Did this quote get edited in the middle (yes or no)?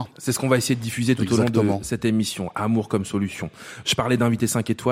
no